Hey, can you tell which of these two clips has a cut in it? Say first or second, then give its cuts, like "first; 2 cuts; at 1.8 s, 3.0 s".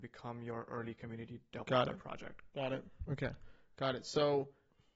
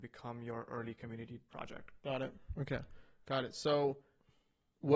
second; 1 cut; at 1.5 s